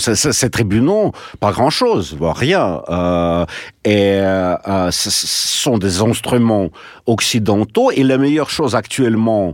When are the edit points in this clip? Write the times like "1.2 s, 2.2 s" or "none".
none